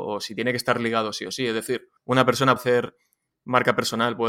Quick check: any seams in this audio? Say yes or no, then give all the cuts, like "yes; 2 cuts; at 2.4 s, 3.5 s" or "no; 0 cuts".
yes; 2 cuts; at 2.0 s, 2.6 s